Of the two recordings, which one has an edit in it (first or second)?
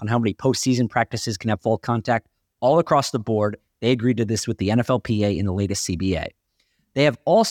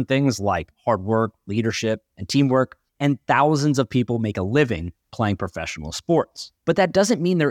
second